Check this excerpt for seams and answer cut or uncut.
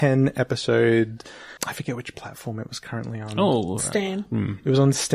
cut